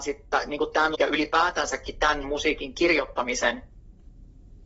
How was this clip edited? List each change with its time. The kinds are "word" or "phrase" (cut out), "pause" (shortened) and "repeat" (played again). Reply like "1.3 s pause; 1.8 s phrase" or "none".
0.9 s word; 2.2 s word